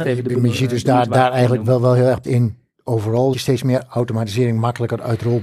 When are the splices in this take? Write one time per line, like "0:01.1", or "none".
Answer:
0:02.2
0:03.3